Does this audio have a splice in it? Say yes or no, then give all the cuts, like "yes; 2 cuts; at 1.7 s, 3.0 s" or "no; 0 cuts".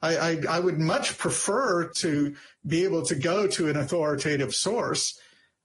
yes; 1 cut; at 1.9 s